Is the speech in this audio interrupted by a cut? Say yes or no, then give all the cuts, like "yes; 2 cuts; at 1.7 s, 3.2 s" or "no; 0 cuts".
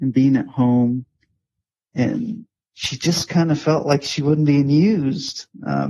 no; 0 cuts